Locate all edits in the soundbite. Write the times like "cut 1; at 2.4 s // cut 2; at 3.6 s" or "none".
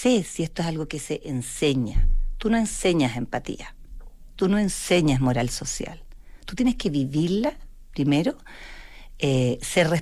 none